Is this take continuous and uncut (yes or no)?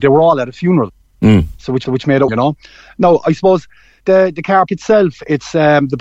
no